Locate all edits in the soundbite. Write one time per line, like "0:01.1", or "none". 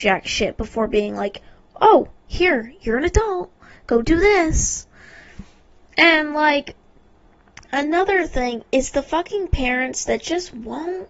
none